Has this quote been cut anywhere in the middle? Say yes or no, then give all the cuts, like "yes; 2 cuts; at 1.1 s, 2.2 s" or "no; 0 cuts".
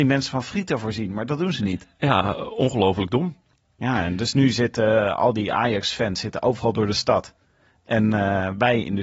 no; 0 cuts